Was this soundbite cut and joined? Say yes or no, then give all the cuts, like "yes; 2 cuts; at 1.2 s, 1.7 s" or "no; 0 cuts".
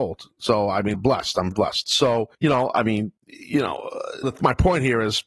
yes; 5 cuts; at 0.9 s, 1.5 s, 2.3 s, 3.2 s, 4.2 s